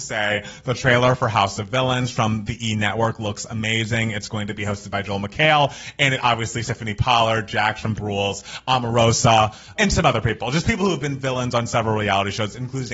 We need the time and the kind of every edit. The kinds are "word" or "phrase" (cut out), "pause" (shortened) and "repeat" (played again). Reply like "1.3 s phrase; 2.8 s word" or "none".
6.6 s word; 7.9 s word; 9.8 s word